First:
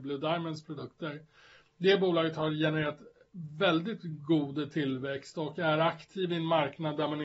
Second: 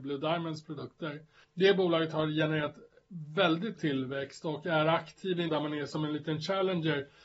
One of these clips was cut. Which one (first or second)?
second